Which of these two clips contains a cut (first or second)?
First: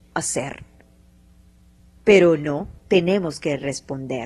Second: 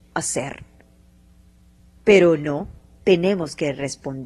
first